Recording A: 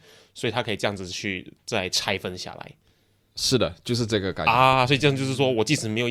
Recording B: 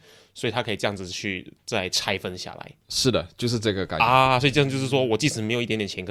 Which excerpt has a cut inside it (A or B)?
B